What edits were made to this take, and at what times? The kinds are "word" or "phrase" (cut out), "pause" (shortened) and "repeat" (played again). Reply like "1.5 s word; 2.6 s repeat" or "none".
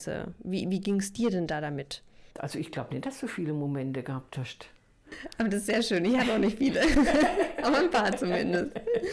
2.3 s pause